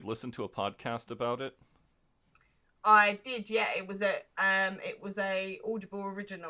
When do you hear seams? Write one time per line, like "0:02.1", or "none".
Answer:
none